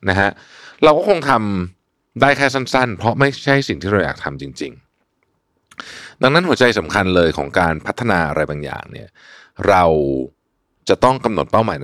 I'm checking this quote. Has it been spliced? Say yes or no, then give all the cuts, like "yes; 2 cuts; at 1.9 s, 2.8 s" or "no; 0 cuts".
no; 0 cuts